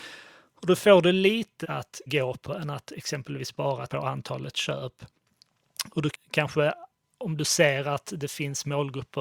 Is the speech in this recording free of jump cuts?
no; 4 cuts; at 1.6 s, 2.1 s, 3.9 s, 6.1 s

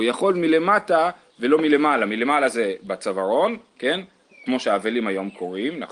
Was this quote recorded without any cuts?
yes; 0 cuts

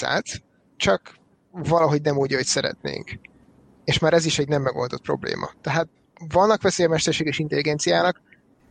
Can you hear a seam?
no; 0 cuts

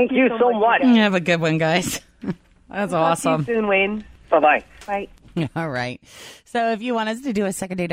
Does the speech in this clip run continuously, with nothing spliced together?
yes; 0 cuts

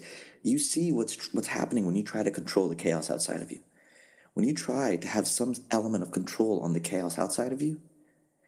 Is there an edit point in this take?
no; 0 cuts

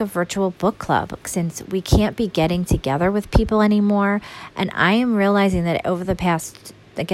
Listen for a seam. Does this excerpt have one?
no; 0 cuts

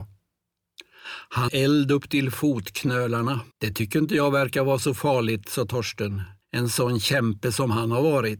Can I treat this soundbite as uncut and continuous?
no; 3 cuts; at 1.5 s, 3.5 s, 6.4 s

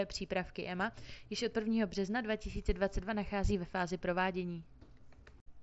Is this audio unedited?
yes; 0 cuts

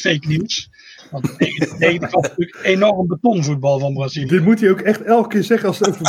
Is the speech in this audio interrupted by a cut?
no; 0 cuts

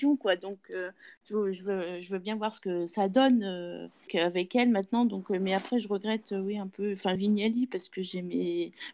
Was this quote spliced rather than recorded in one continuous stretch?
yes; 2 cuts; at 4.1 s, 7.2 s

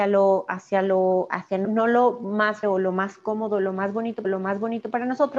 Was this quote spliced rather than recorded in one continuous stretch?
yes; 3 cuts; at 1.6 s, 2.6 s, 4.2 s

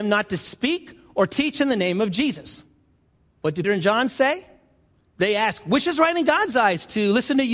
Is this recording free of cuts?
no; 1 cut; at 3.6 s

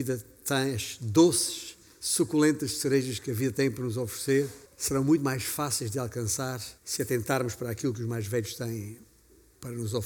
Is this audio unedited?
no; 2 cuts; at 4.6 s, 6.8 s

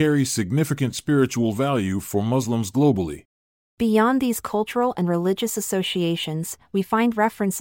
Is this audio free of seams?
yes; 0 cuts

